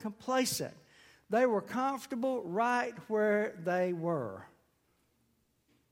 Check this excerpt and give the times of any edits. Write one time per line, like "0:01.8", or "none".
none